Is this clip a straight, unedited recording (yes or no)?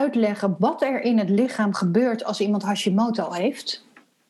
yes